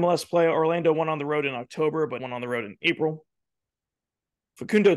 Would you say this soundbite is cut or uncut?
cut